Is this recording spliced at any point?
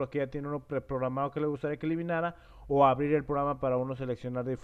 no; 0 cuts

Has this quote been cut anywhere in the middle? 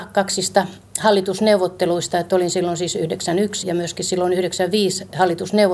yes; 1 cut; at 3.6 s

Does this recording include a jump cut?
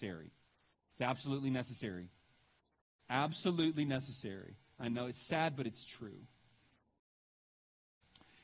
no; 0 cuts

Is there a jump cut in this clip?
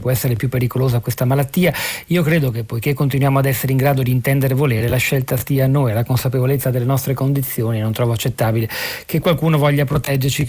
no; 0 cuts

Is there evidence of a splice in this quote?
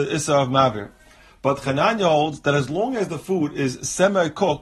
no; 0 cuts

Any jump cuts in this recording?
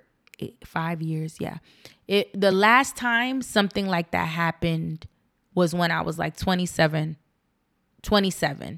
no; 0 cuts

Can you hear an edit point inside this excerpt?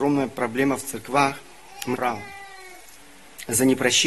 yes; 1 cut; at 1.9 s

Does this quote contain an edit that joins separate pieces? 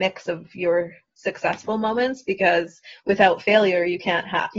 no; 0 cuts

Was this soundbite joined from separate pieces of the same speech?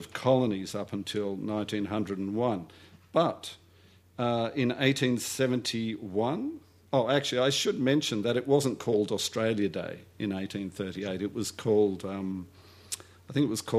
no; 0 cuts

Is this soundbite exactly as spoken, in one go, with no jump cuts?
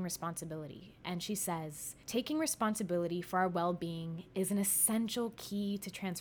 no; 1 cut; at 2.0 s

